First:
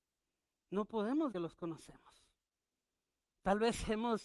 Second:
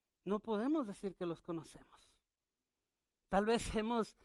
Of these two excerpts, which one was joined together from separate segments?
first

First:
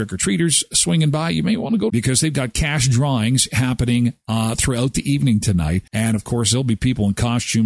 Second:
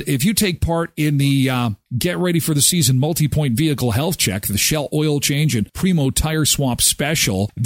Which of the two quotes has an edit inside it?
first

